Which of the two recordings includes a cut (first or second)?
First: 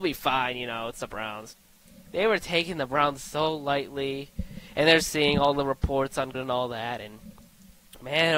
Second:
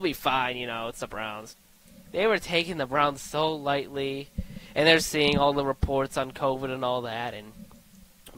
first